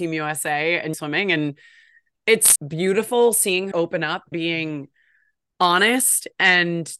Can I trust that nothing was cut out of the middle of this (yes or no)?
no